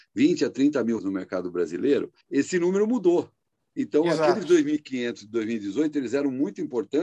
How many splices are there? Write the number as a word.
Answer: two